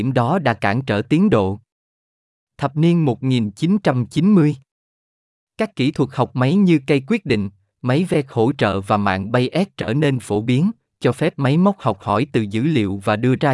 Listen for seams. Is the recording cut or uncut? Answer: uncut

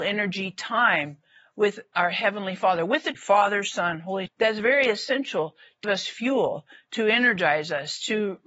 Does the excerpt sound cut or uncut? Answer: cut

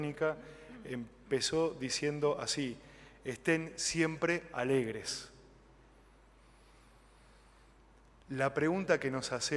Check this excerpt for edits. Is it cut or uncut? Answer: uncut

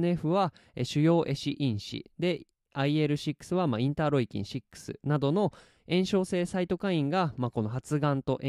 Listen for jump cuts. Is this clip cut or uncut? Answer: uncut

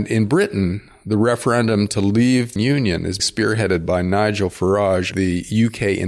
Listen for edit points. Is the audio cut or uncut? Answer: cut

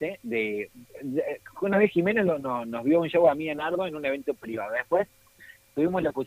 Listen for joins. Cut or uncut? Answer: uncut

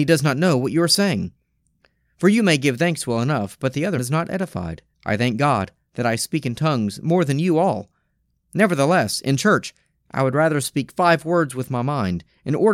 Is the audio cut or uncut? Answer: cut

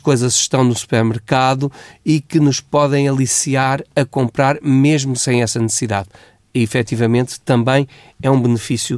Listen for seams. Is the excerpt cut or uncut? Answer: uncut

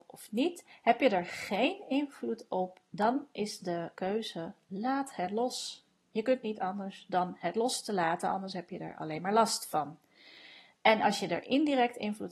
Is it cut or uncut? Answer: uncut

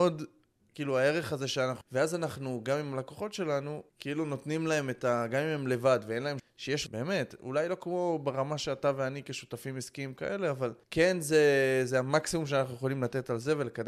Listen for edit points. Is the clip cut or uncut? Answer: cut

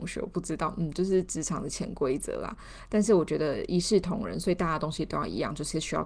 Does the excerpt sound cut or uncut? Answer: uncut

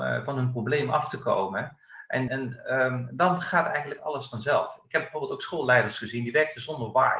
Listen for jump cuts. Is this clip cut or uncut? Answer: cut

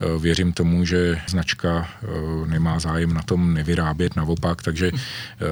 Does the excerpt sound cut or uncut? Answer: cut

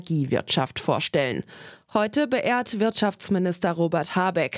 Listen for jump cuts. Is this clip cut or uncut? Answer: uncut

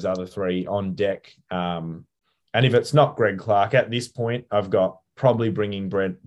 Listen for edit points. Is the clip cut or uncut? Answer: uncut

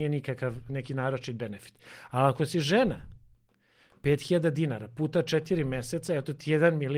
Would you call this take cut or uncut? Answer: uncut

